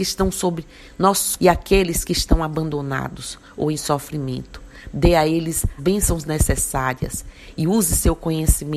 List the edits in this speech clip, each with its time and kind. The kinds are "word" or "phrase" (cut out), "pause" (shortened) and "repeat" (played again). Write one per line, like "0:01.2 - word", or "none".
0:01.4 - word
0:05.8 - word

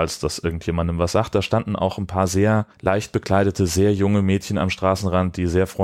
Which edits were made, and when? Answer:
0:02.7 - pause

